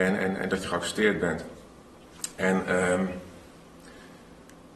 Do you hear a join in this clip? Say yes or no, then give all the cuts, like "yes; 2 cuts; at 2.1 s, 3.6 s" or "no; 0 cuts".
no; 0 cuts